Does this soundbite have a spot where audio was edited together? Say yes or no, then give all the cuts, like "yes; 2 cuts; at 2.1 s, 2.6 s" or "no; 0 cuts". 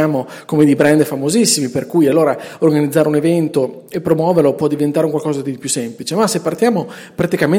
no; 0 cuts